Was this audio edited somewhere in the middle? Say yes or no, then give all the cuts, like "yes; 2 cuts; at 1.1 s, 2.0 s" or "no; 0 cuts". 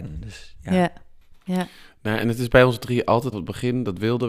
yes; 1 cut; at 3.3 s